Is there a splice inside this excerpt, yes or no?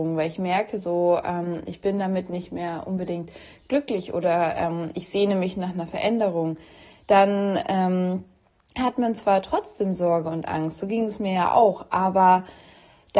no